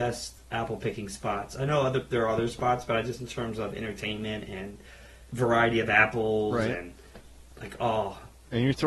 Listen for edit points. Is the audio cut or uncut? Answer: cut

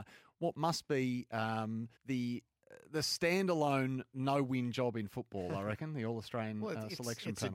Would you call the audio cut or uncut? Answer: cut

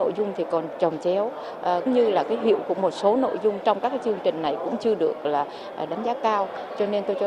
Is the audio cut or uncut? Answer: cut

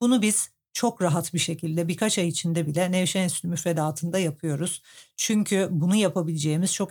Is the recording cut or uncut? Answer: uncut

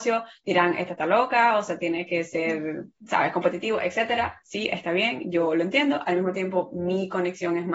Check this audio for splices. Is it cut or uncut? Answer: uncut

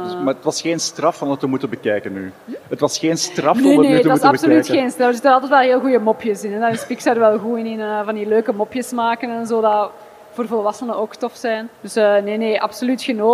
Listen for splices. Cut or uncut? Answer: cut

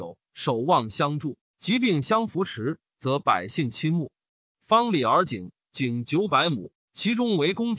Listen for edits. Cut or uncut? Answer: uncut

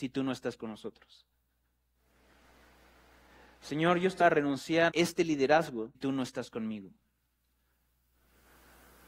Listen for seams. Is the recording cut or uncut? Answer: cut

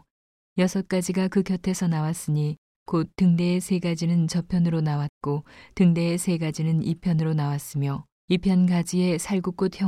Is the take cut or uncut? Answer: cut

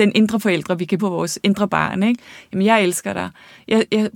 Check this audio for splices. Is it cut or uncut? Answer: cut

